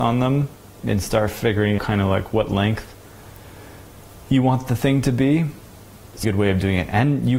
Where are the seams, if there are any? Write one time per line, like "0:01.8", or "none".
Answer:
0:01.8
0:06.2

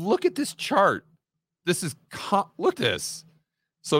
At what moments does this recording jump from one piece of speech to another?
0:02.7

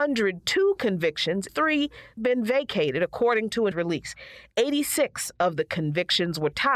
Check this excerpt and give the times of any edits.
0:01.5
0:02.2
0:03.7

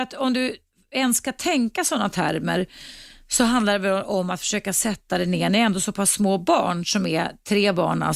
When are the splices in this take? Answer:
none

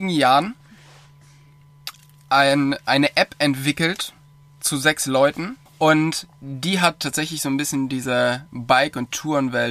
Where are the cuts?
0:05.7

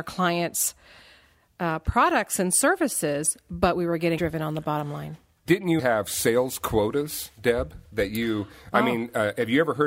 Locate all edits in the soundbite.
0:04.2
0:05.5
0:05.8

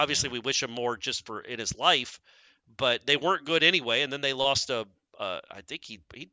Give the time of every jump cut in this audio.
none

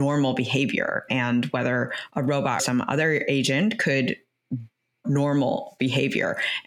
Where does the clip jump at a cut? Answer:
0:01.1
0:02.6
0:05.0

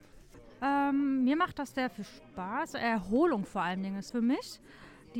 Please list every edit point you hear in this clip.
0:04.1

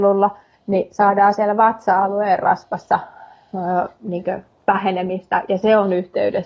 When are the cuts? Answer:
none

